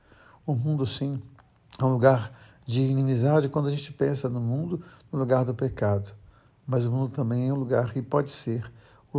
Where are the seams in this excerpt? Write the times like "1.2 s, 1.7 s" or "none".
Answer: none